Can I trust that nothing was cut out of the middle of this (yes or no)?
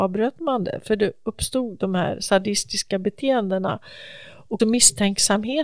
no